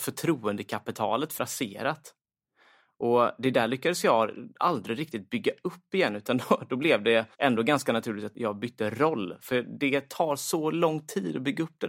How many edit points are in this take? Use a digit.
3